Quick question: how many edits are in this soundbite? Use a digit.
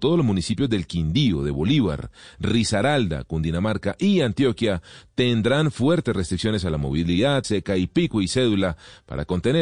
1